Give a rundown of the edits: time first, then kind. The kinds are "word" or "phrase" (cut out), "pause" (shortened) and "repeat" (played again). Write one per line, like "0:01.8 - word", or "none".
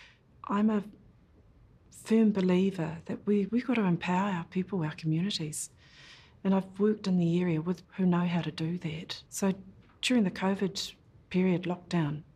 0:03.5 - word
0:07.8 - word
0:09.3 - pause